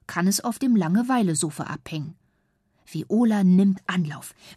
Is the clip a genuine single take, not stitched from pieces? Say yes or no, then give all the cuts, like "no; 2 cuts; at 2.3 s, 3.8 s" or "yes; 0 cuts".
yes; 0 cuts